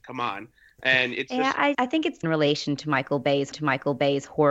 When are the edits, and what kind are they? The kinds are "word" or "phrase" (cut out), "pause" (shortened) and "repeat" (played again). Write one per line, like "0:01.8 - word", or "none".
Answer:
0:01.7 - word
0:02.2 - phrase
0:03.5 - repeat